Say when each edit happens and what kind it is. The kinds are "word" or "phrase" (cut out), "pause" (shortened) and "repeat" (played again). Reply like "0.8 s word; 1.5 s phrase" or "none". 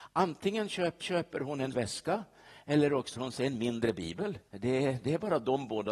1.0 s repeat; 1.7 s word; 3.2 s word; 4.5 s pause